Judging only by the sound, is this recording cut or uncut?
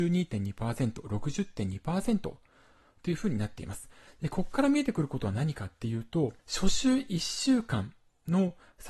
cut